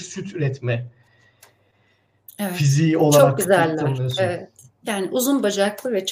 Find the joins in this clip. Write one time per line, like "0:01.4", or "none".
none